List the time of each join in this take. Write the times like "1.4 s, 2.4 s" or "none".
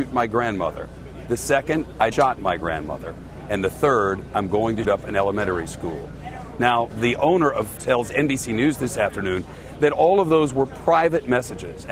2.1 s, 4.8 s, 6.9 s, 7.8 s